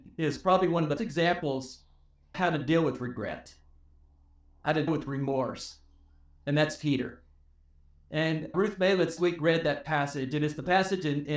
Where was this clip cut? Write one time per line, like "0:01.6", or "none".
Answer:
0:01.0
0:02.3
0:04.9
0:08.5
0:09.2

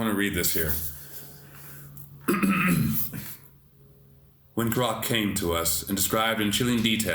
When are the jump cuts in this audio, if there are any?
0:04.7

